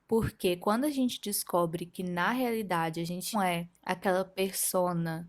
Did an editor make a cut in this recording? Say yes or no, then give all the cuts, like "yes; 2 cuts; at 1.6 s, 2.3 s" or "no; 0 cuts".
yes; 2 cuts; at 3.3 s, 3.8 s